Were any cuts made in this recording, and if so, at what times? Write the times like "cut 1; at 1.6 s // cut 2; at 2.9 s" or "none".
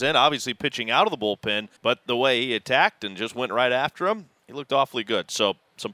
cut 1; at 1.8 s